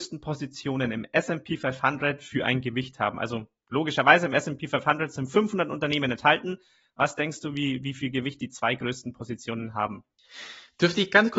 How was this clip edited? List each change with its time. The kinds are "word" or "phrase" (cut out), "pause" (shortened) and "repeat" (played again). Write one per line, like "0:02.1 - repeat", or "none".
none